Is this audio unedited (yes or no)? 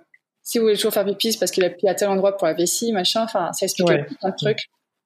yes